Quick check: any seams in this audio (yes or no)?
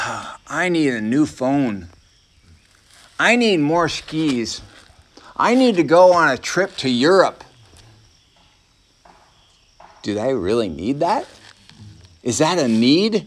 no